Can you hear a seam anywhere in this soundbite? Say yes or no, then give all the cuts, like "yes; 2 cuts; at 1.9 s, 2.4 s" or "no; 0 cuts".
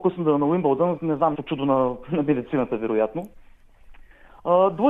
yes; 2 cuts; at 1.0 s, 1.3 s